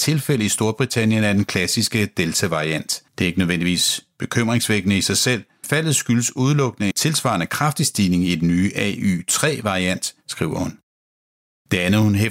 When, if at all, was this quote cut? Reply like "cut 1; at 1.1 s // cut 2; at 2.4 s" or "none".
cut 1; at 3.1 s // cut 2; at 5.6 s // cut 3; at 6.9 s // cut 4; at 10.2 s